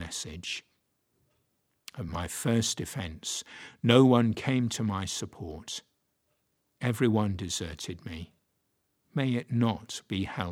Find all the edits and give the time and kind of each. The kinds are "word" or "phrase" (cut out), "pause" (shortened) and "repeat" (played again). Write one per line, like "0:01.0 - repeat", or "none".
none